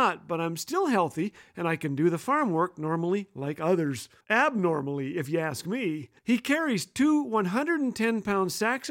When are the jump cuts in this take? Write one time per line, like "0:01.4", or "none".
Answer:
0:04.2
0:06.2